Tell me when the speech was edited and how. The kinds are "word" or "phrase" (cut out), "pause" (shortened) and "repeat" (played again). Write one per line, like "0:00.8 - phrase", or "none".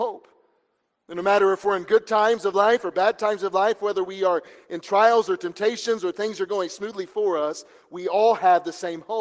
none